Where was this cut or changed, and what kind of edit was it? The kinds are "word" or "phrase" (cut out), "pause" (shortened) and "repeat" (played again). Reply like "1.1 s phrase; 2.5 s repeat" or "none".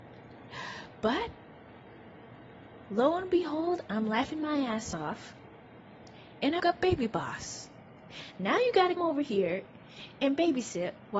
6.6 s word; 9.0 s word